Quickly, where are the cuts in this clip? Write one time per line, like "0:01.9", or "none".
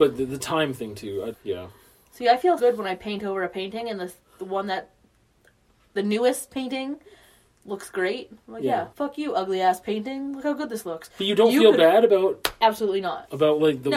0:01.3
0:02.6
0:08.4
0:08.9

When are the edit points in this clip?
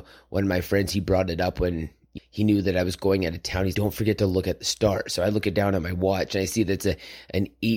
0:02.2
0:03.7

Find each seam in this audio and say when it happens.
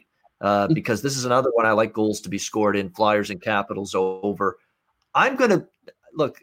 none

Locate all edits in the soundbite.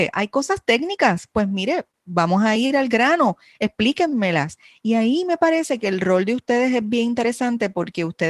none

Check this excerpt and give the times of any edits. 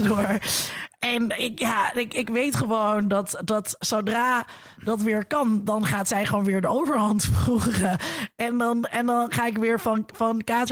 none

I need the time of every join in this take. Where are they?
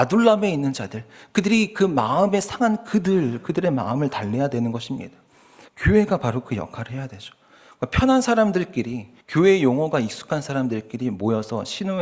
0:05.7
0:09.2

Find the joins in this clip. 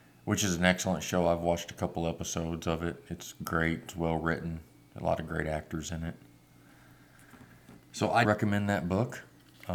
0:07.8
0:08.2

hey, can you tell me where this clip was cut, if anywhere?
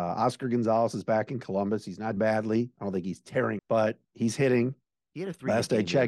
0:02.2
0:03.6

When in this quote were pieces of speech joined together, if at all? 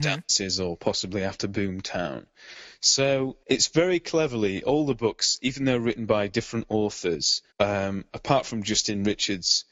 0:03.4
0:07.5

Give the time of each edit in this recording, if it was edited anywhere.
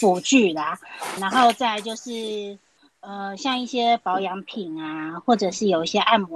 0:01.2

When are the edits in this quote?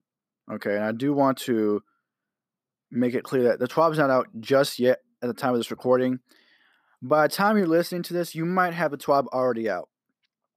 none

